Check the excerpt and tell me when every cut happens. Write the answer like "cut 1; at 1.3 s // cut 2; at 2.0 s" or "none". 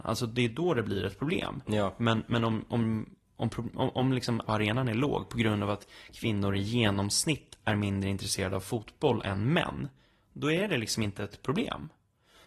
cut 1; at 4.4 s